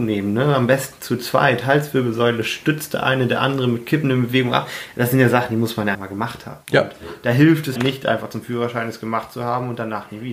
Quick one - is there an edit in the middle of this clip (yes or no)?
yes